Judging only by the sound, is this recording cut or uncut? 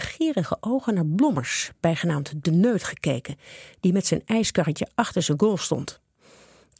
uncut